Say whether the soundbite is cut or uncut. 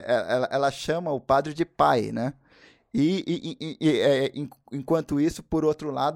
uncut